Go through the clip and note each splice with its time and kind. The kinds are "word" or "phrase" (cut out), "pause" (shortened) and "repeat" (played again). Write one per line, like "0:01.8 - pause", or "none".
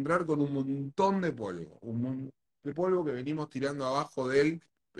0:02.7 - phrase